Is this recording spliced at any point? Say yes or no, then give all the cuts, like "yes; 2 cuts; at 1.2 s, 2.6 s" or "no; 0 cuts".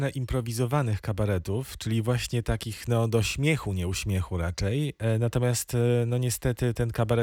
no; 0 cuts